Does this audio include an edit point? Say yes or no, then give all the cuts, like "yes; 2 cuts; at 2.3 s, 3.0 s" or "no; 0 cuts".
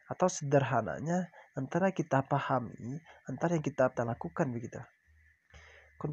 yes; 1 cut; at 3.9 s